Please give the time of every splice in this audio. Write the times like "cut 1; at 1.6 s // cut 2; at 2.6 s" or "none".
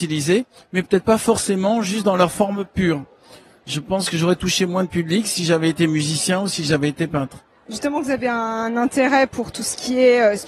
none